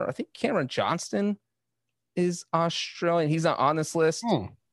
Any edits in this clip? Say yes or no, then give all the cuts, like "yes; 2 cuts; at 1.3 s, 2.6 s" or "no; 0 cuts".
no; 0 cuts